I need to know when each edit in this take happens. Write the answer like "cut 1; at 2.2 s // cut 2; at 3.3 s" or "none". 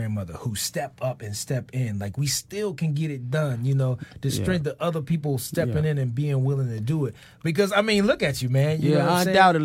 none